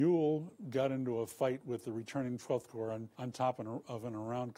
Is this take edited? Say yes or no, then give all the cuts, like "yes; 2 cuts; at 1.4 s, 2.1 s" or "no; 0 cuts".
yes; 1 cut; at 3.1 s